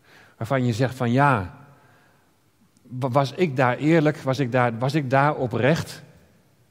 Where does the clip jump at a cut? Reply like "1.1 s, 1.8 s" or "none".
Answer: none